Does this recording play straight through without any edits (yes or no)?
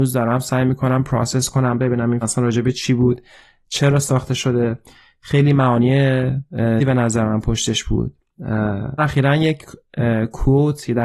no